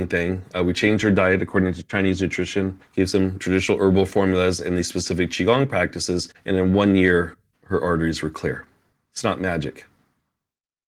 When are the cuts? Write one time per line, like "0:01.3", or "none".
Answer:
none